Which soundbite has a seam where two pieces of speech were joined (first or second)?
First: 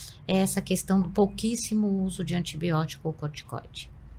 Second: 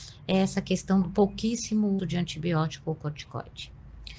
second